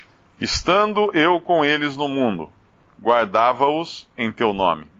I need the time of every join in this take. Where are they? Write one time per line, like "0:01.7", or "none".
0:02.7